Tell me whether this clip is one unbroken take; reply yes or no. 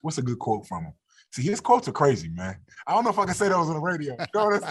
yes